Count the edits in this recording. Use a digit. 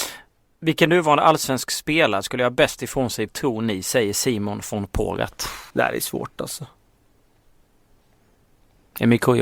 2